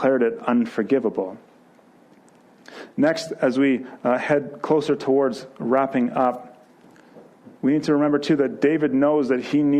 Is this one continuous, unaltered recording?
no; 1 cut; at 7.6 s

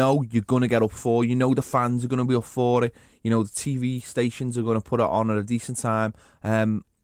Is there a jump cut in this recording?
no; 0 cuts

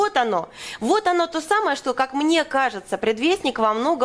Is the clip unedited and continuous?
yes; 0 cuts

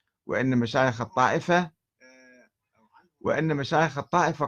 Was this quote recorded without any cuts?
yes; 0 cuts

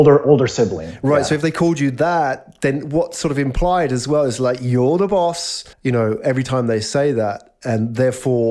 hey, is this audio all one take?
no; 1 cut; at 5.7 s

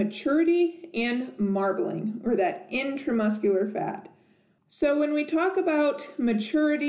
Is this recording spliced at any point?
no; 0 cuts

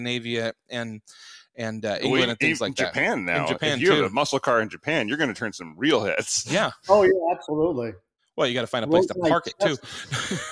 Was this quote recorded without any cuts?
yes; 0 cuts

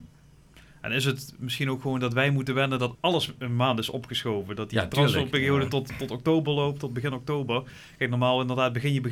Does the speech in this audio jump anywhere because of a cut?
yes; 1 cut; at 3.0 s

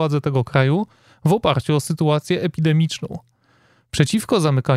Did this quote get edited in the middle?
no; 0 cuts

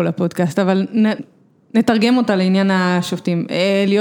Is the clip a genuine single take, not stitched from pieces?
no; 1 cut; at 1.2 s

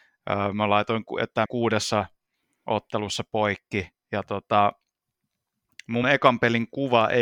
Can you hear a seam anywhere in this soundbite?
yes; 2 cuts; at 1.5 s, 6.0 s

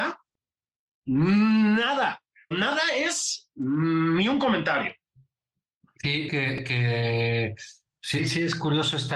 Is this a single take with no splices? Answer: no; 3 cuts; at 2.5 s, 6.3 s, 8.2 s

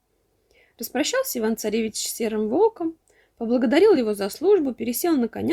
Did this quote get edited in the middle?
no; 0 cuts

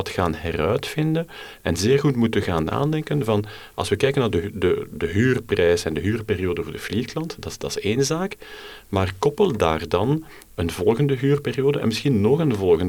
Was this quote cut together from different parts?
no; 0 cuts

